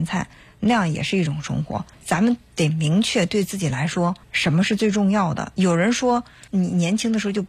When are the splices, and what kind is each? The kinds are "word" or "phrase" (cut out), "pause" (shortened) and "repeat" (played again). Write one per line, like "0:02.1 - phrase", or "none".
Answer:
0:01.9 - pause
0:04.2 - pause
0:06.5 - pause